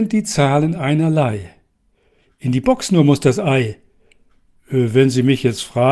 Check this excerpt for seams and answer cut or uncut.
uncut